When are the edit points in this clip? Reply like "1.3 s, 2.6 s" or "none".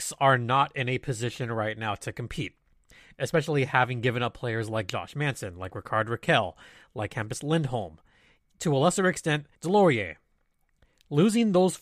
9.5 s